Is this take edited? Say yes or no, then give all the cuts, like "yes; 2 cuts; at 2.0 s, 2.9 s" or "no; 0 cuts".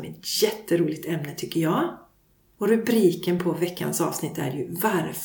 no; 0 cuts